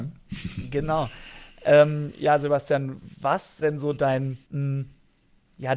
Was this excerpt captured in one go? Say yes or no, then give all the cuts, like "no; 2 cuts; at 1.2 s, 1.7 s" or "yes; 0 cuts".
no; 2 cuts; at 3.6 s, 4.4 s